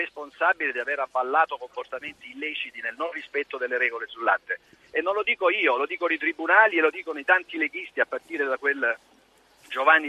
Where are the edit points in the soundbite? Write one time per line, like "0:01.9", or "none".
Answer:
none